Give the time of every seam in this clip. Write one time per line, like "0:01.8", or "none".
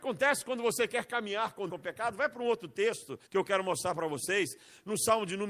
0:01.7
0:03.3